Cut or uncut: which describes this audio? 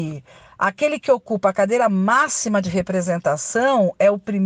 uncut